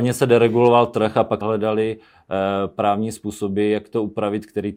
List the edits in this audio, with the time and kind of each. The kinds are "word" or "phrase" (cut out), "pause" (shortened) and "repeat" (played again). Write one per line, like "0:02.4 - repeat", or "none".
0:01.4 - word